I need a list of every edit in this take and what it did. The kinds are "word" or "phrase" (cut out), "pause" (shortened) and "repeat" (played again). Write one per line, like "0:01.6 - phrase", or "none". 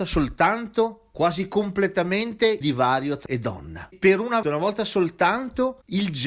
0:01.1 - word
0:02.6 - word
0:03.3 - word
0:04.4 - word